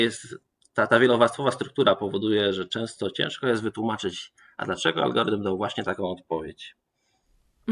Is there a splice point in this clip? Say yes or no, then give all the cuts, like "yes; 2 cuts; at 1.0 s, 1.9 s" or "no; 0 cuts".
no; 0 cuts